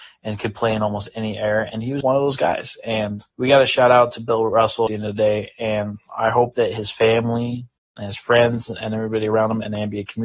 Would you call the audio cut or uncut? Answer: cut